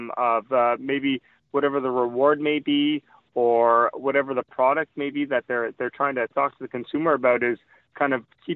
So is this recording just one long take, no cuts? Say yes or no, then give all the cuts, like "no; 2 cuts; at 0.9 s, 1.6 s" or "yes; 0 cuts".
no; 1 cut; at 3.9 s